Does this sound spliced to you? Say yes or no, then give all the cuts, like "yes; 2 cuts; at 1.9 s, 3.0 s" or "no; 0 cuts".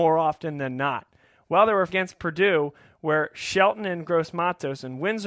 yes; 1 cut; at 1.9 s